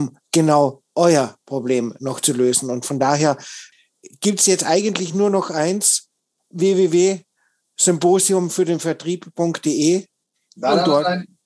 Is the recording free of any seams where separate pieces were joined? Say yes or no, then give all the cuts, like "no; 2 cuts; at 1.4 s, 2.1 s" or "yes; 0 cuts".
yes; 0 cuts